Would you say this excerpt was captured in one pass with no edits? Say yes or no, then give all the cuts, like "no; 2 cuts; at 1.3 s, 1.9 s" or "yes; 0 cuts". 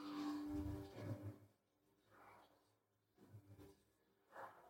yes; 0 cuts